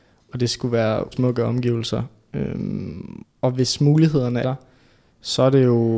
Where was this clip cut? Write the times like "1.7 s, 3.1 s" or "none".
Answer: 1.1 s, 3.2 s, 4.4 s